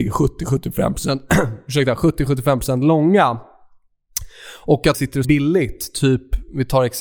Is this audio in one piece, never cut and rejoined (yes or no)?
no